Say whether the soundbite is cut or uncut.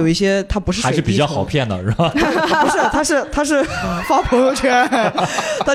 uncut